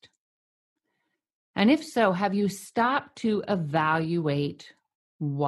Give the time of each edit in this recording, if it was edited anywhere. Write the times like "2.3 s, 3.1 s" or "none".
none